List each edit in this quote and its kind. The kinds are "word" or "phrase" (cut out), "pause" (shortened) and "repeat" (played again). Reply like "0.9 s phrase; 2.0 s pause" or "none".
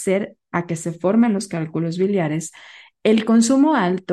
none